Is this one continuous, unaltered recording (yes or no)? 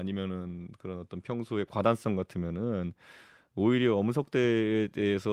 yes